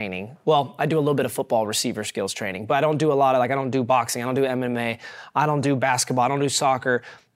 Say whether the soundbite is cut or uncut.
uncut